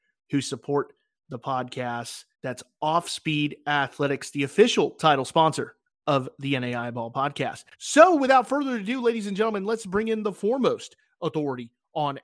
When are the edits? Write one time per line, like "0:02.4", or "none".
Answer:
0:02.3
0:07.7